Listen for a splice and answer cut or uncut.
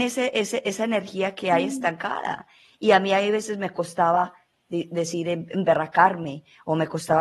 uncut